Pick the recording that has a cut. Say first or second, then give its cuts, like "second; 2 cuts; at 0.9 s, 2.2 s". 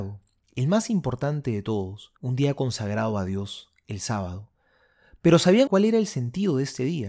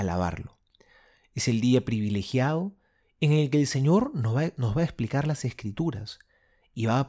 first; 2 cuts; at 2.2 s, 5.7 s